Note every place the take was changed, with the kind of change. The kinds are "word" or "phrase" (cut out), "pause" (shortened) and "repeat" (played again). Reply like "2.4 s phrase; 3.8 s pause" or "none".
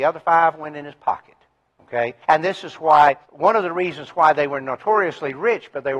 2.2 s pause; 3.2 s pause